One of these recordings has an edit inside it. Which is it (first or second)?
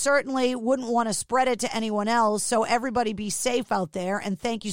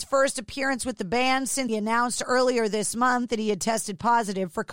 second